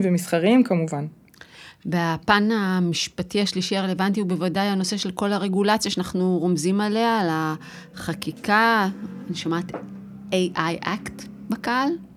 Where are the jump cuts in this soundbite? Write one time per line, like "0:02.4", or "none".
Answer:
none